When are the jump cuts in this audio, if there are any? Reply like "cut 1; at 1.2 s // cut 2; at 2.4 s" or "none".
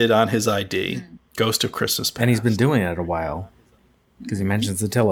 none